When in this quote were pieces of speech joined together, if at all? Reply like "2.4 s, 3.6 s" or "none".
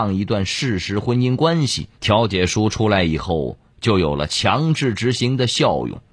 1.9 s